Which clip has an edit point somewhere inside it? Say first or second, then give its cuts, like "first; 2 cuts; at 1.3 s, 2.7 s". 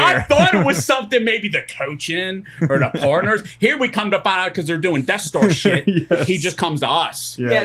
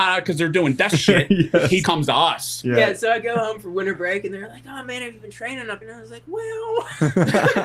second; 3 cuts; at 0.9 s, 1.8 s, 5.8 s